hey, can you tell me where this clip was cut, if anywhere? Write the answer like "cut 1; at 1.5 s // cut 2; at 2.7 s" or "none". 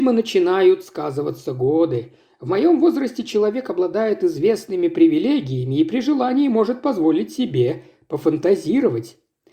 none